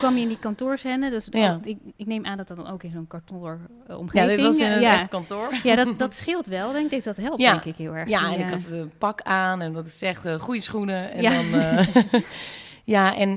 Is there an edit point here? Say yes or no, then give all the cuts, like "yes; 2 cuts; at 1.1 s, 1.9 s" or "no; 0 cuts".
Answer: no; 0 cuts